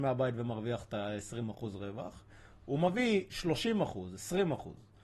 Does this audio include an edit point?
no; 0 cuts

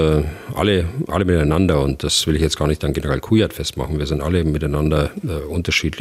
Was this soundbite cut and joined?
no; 0 cuts

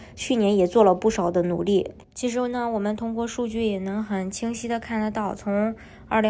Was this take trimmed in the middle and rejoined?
yes; 1 cut; at 2.0 s

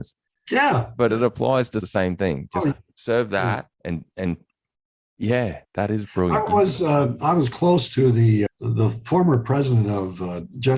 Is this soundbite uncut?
no; 6 cuts; at 1.8 s, 2.7 s, 3.7 s, 5.6 s, 6.5 s, 8.5 s

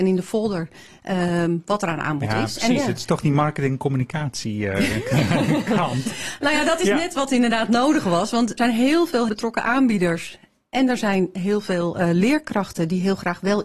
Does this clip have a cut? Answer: yes; 2 cuts; at 8.6 s, 9.3 s

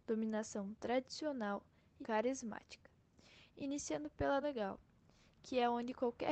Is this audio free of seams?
no; 2 cuts; at 2.0 s, 4.4 s

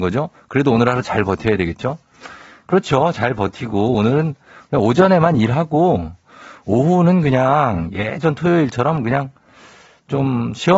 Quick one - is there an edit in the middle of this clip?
no; 0 cuts

